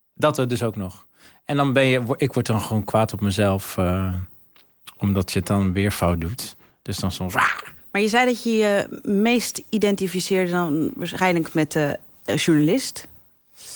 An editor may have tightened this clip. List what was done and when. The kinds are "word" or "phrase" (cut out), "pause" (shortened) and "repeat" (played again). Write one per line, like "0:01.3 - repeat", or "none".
none